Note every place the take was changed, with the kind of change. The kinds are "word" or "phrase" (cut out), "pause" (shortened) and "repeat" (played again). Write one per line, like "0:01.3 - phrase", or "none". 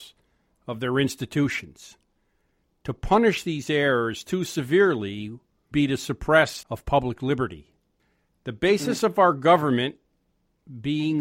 0:05.7 - word
0:06.6 - phrase